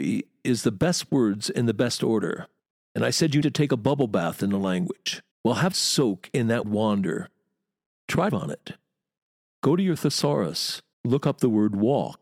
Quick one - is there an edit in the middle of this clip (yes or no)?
yes